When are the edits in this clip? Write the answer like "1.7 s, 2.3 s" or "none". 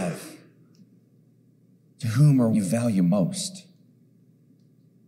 2.5 s